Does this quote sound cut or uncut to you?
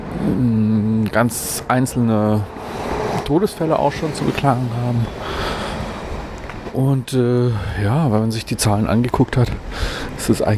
uncut